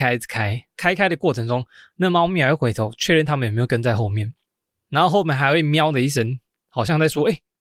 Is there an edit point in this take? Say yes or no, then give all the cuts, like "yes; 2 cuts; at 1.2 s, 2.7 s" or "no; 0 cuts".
no; 0 cuts